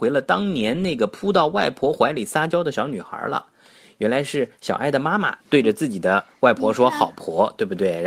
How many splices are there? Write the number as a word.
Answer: one